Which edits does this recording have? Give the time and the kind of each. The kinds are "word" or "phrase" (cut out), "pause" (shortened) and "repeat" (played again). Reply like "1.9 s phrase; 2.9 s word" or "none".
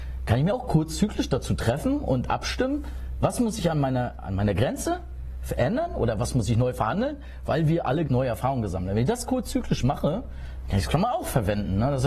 8.1 s word